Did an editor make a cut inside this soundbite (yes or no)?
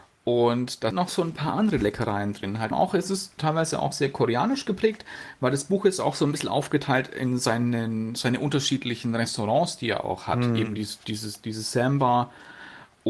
yes